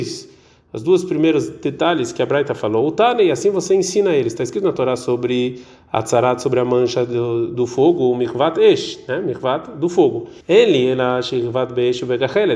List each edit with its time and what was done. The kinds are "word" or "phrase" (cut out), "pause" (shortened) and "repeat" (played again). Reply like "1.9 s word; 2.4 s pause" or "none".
10.4 s pause